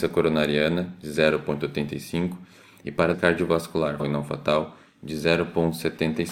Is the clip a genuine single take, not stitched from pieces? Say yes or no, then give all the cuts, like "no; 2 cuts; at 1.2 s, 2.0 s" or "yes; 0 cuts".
no; 2 cuts; at 3.1 s, 4.0 s